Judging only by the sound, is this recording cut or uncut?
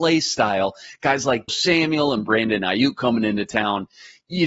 cut